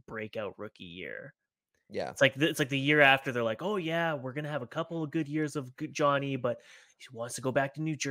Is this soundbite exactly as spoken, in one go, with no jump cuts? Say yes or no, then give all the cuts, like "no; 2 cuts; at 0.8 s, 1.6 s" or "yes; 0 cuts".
yes; 0 cuts